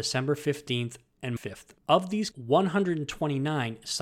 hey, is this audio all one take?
no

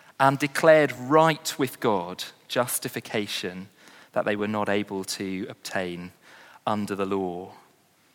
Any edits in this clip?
no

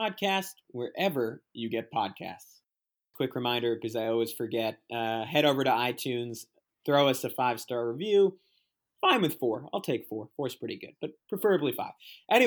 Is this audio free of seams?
yes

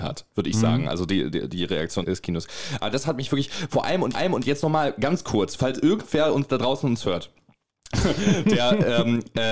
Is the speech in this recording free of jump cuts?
no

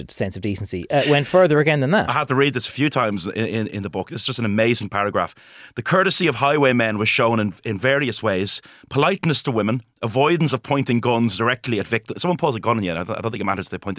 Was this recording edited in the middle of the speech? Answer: no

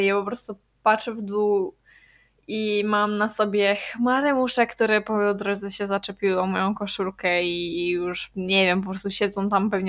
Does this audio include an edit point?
no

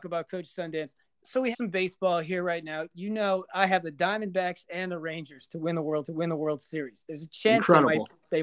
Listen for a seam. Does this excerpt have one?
yes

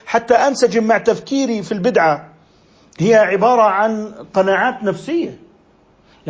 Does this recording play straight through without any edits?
yes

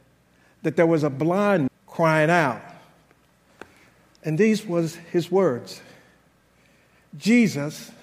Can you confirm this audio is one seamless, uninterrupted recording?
no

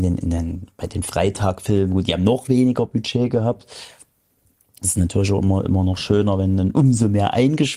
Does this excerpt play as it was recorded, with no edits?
yes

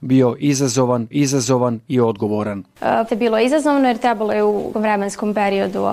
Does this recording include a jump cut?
yes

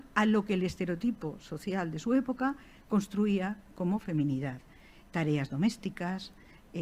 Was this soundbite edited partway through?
no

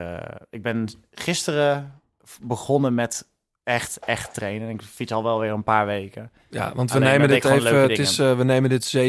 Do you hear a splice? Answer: no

